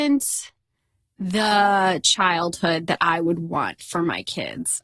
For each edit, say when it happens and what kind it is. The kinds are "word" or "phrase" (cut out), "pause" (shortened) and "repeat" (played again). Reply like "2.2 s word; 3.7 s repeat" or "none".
none